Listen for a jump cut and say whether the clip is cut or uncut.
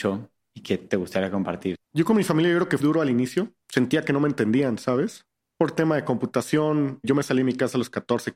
cut